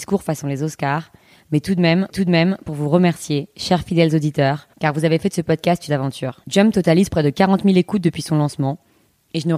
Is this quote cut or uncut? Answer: cut